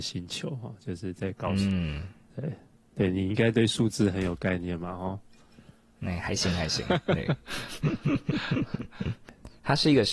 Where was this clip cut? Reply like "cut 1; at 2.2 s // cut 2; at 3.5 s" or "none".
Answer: none